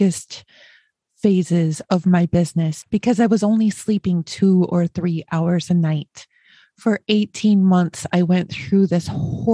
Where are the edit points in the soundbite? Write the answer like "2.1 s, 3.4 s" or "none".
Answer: none